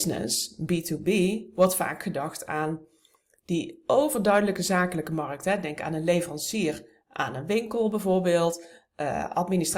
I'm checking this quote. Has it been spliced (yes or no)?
no